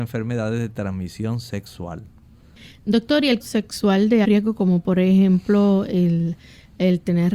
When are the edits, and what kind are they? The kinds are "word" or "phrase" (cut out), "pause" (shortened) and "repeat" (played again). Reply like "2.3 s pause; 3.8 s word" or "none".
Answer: 3.4 s word; 4.2 s word

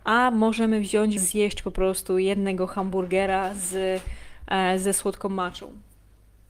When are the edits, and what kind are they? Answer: 1.2 s phrase

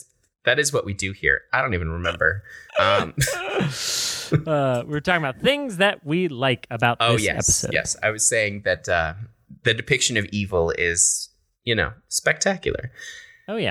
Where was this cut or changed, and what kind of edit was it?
2.7 s pause

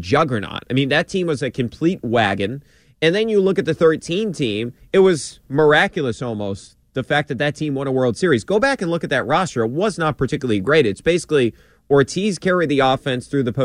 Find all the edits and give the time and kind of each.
none

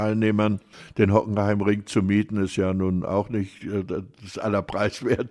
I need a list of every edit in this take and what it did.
none

